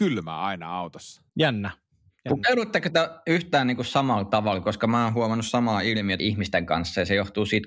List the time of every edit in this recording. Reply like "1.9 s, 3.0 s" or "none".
1.3 s, 6.2 s